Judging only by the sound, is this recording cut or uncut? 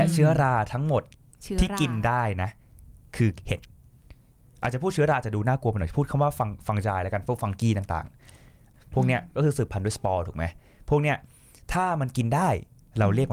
uncut